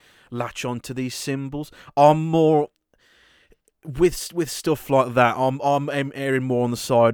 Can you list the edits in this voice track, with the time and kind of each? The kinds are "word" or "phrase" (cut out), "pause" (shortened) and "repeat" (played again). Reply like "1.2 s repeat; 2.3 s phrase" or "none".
none